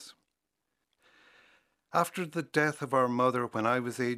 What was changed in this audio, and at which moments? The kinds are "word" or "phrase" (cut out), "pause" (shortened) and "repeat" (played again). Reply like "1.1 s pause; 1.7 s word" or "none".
none